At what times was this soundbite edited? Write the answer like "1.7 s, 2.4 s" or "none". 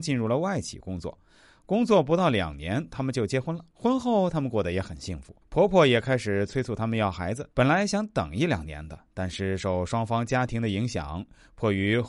3.7 s, 5.4 s, 7.5 s